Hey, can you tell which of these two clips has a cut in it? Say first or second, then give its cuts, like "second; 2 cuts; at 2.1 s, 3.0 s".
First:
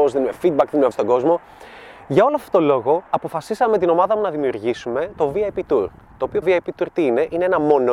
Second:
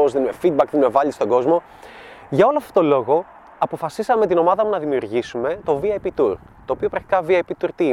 first; 3 cuts; at 0.9 s, 3.1 s, 6.4 s